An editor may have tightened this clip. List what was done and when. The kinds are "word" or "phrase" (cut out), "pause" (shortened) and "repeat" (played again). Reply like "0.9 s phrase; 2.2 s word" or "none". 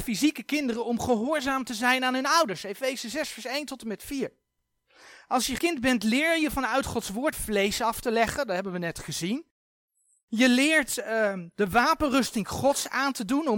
5.6 s word; 7.3 s word